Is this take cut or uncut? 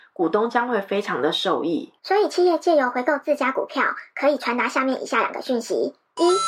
cut